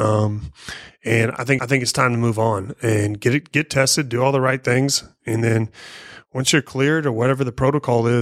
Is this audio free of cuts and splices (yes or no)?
no